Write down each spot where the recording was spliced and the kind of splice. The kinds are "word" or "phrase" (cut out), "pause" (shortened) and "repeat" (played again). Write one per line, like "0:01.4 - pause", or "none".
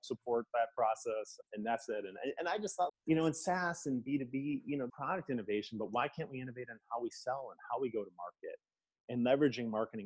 0:01.4 - word
0:02.9 - word
0:04.9 - phrase